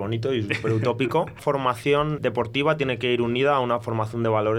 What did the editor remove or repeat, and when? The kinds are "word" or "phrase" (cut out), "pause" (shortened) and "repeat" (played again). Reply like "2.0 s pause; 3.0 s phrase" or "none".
1.4 s phrase; 2.2 s word